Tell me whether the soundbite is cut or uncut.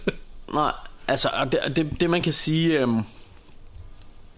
uncut